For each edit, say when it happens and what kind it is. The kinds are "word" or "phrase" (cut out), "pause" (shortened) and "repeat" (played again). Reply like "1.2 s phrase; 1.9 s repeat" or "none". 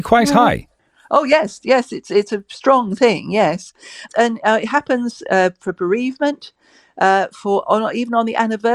none